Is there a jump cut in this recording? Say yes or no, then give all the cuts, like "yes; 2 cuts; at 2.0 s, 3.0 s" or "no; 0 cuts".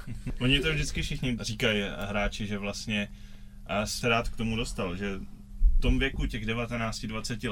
yes; 3 cuts; at 1.4 s, 4.0 s, 5.8 s